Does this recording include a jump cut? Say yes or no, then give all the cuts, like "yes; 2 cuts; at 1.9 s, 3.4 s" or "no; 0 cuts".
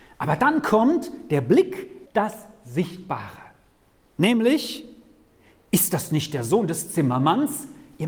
yes; 1 cut; at 2.1 s